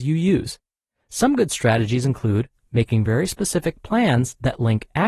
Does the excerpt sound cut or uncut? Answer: uncut